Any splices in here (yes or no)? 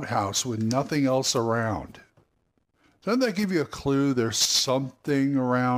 no